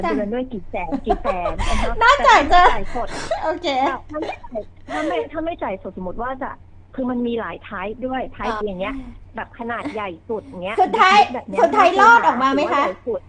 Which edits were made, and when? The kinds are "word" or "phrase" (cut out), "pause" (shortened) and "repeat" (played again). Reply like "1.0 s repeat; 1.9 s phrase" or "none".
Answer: 8.6 s phrase